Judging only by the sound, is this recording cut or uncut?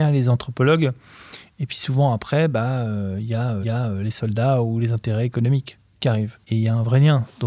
cut